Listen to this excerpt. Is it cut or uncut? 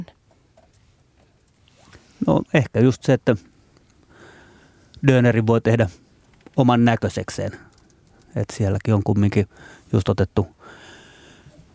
uncut